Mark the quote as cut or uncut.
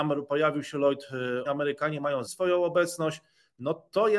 cut